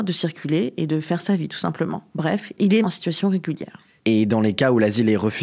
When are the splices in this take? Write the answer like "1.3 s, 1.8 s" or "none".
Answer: 2.8 s